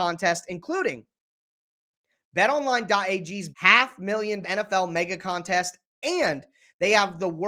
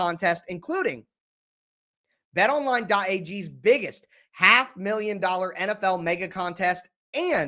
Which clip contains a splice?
first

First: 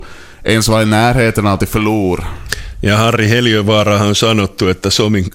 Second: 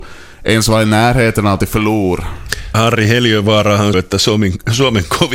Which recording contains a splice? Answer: second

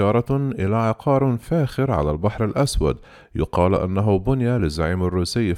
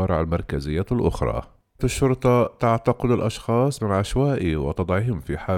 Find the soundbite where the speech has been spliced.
second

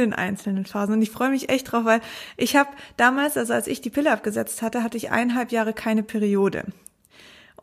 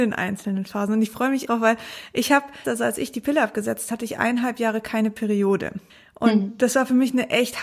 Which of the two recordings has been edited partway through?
second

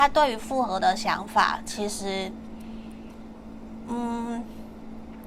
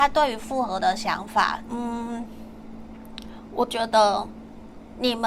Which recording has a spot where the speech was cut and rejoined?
second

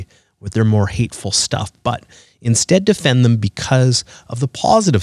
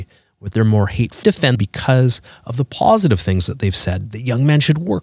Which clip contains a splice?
second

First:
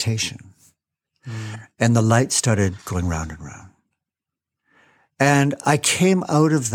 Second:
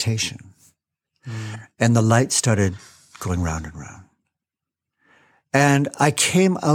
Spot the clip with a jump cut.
first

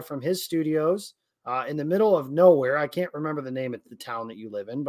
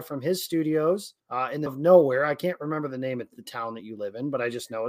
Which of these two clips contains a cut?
second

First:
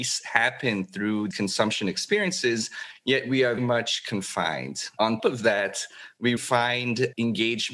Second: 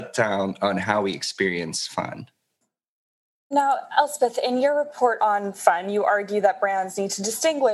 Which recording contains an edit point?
first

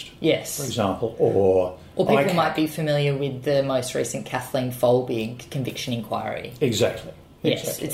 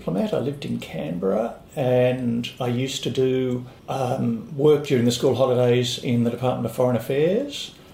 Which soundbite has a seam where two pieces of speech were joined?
second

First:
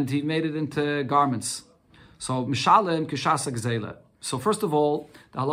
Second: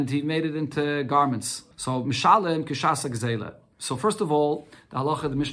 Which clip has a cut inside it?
second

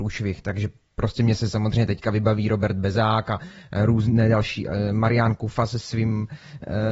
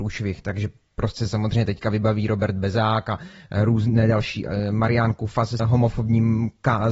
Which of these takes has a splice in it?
second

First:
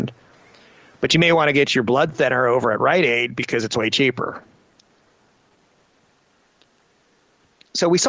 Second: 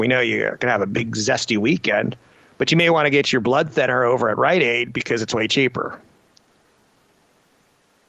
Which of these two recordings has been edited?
second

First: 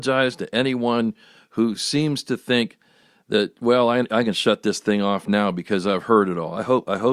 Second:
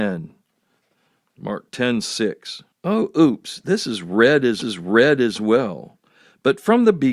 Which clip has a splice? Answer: second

